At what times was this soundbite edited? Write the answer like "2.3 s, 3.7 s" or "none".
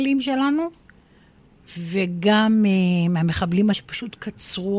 3.7 s